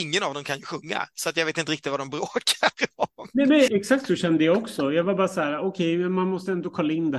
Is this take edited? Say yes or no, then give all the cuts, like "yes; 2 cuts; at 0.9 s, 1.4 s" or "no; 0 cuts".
yes; 1 cut; at 3.7 s